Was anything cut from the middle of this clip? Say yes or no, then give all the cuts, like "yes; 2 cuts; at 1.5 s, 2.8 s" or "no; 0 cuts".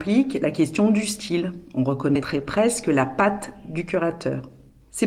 no; 0 cuts